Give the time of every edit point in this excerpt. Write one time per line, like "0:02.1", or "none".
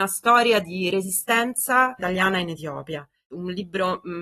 0:02.0